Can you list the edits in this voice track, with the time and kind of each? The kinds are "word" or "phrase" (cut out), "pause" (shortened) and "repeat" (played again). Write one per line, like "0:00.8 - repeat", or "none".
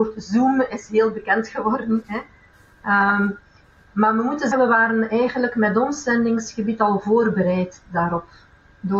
0:04.5 - word